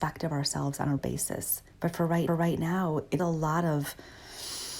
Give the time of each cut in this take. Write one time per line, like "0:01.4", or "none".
0:01.0
0:01.7
0:02.3
0:03.2

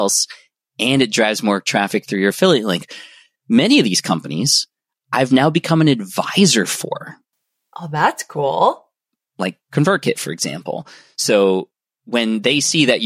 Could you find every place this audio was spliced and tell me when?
none

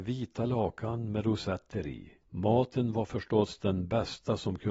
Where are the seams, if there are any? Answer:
0:02.2

